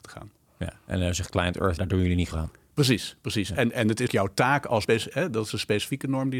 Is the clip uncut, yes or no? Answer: no